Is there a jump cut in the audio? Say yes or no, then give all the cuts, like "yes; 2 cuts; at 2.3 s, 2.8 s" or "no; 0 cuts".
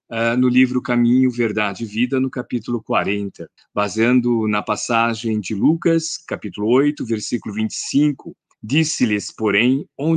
yes; 2 cuts; at 3.6 s, 8.5 s